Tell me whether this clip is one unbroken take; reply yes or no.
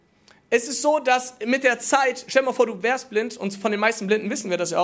yes